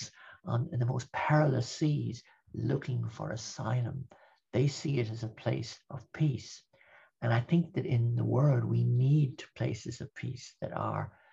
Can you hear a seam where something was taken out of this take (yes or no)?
yes